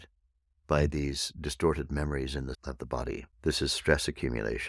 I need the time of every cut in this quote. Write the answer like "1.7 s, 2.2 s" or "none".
2.5 s, 3.3 s